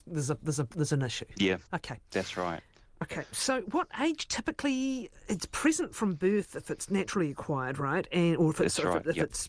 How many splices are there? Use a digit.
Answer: 1